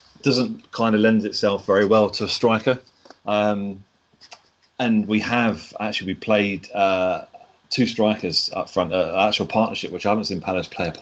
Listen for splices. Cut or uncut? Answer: uncut